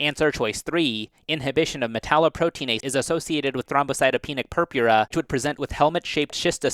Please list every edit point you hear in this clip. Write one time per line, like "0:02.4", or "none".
0:02.8
0:03.6
0:05.1